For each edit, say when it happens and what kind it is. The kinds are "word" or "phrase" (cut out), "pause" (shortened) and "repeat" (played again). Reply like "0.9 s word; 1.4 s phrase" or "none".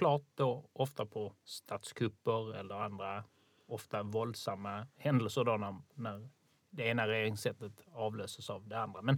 none

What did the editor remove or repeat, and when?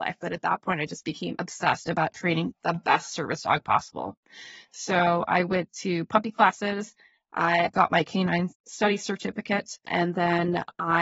none

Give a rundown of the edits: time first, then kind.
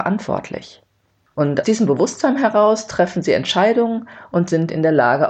1.6 s word

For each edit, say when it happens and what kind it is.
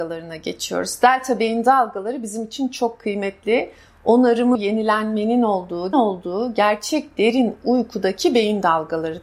4.5 s word; 5.9 s word

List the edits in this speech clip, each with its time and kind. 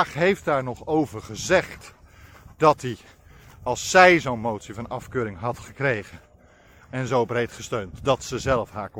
none

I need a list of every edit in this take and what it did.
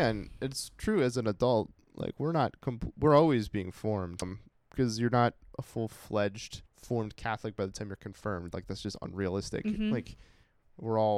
4.2 s phrase; 6.7 s pause

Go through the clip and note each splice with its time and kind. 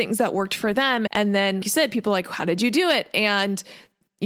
1.1 s word; 1.6 s word

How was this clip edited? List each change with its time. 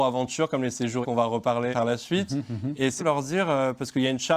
1.0 s word; 1.7 s word; 3.0 s word

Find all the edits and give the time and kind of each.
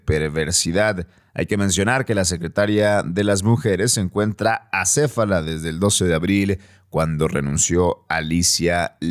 none

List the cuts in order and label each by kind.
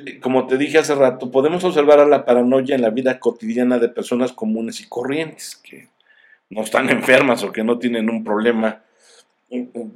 none

